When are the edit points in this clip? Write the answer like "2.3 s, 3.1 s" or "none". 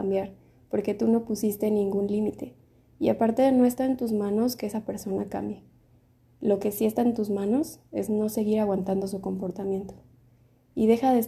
none